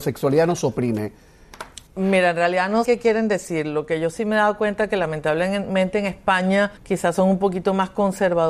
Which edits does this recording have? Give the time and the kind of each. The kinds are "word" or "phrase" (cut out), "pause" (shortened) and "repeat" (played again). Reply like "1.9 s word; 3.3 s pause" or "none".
1.9 s pause; 2.8 s word; 6.8 s pause